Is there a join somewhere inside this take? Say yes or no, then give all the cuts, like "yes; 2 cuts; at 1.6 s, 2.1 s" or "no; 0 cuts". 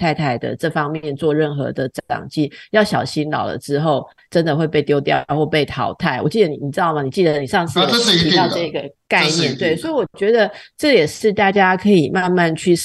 no; 0 cuts